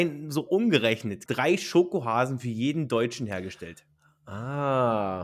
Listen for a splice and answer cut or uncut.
cut